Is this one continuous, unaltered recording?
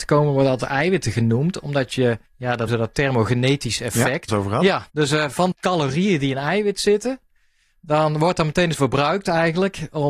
no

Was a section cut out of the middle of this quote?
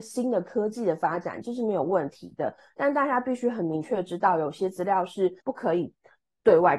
yes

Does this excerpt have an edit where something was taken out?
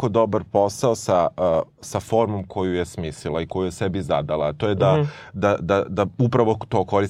no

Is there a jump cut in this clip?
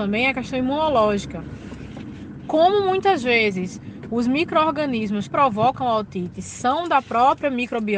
yes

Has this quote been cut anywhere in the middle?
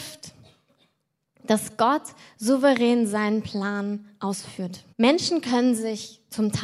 yes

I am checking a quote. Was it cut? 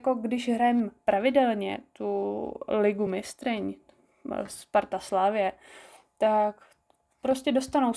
no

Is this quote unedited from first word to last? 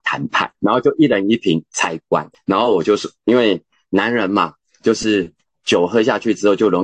yes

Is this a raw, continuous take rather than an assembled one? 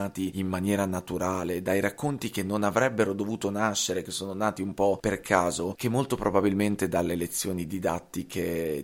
yes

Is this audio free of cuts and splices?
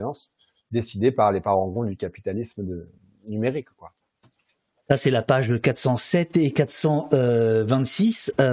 yes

